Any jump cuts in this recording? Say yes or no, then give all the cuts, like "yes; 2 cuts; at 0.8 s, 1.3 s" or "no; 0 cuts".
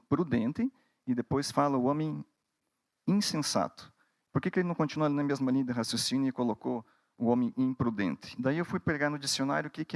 no; 0 cuts